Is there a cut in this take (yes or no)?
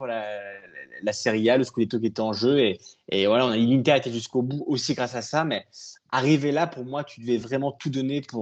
no